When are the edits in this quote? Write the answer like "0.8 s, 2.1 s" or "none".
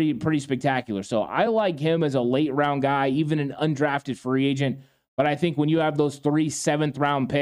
none